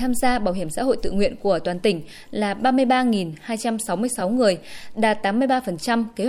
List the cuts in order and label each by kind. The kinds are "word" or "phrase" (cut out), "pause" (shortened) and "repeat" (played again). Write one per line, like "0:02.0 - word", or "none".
none